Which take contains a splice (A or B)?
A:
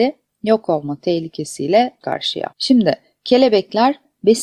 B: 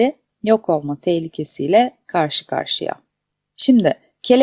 A